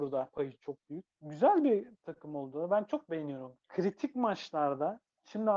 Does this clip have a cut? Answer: no; 0 cuts

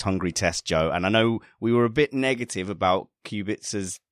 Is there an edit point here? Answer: no; 0 cuts

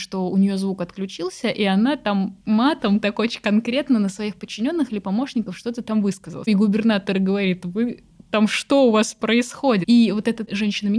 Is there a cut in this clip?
yes; 1 cut; at 3.0 s

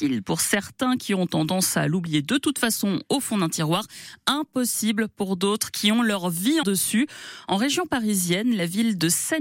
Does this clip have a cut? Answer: yes; 1 cut; at 6.6 s

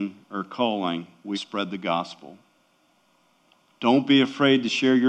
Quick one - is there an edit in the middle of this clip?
yes; 1 cut; at 1.3 s

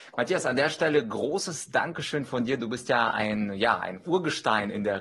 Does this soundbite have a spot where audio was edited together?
no; 0 cuts

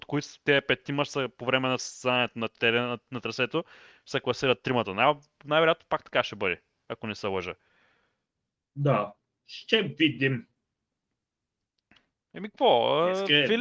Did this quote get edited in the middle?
no; 0 cuts

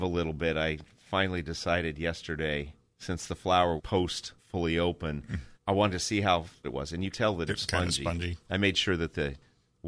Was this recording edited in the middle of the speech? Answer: yes; 7 cuts; at 2.9 s, 3.8 s, 4.4 s, 5.5 s, 6.6 s, 7.1 s, 7.5 s

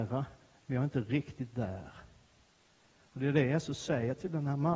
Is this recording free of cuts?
yes; 0 cuts

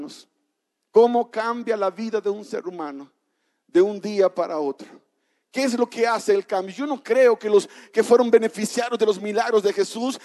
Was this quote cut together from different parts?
no; 0 cuts

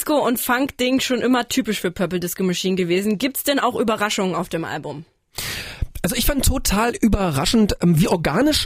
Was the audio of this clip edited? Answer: no; 0 cuts

